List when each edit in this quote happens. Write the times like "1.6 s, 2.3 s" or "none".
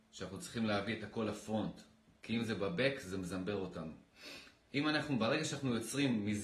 none